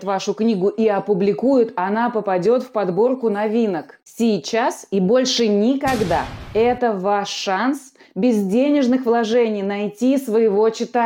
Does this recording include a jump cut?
no; 0 cuts

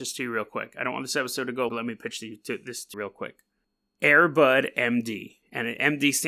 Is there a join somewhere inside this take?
yes; 2 cuts; at 1.7 s, 2.9 s

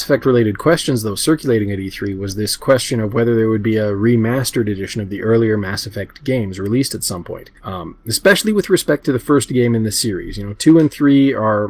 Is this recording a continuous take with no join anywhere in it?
no; 1 cut; at 7.6 s

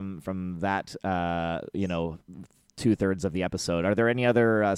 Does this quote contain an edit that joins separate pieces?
no; 0 cuts

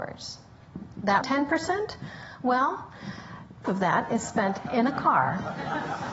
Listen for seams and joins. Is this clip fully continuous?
no; 2 cuts; at 1.2 s, 3.6 s

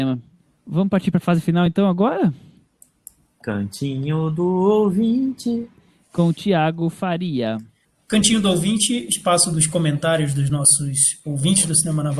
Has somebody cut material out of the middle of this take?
no; 0 cuts

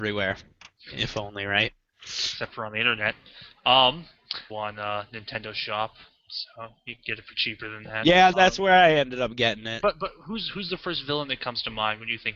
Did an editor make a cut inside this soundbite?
yes; 2 cuts; at 4.5 s, 8.3 s

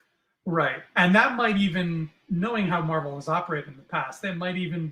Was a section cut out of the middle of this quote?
no; 0 cuts

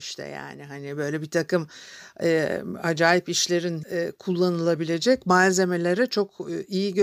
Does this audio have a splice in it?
yes; 1 cut; at 3.8 s

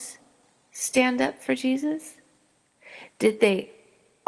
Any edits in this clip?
no; 0 cuts

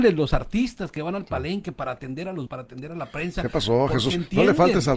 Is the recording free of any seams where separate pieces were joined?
no; 1 cut; at 2.5 s

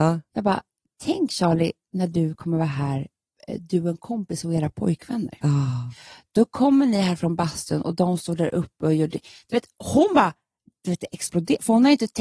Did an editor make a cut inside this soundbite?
no; 0 cuts

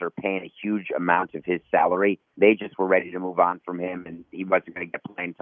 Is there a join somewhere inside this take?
yes; 1 cut; at 2.3 s

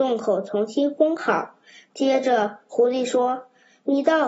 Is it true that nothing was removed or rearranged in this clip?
yes; 0 cuts

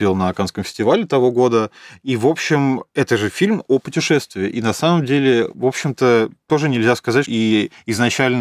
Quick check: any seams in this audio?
yes; 1 cut; at 7.2 s

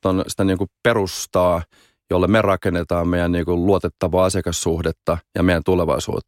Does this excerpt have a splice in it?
no; 0 cuts

